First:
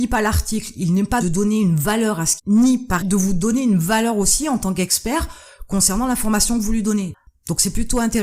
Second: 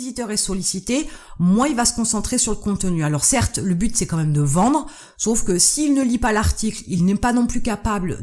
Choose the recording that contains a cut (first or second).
first